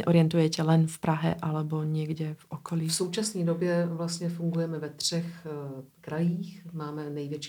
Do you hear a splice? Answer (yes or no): yes